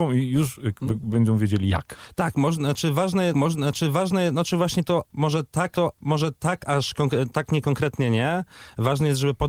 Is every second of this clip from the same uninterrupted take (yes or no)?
no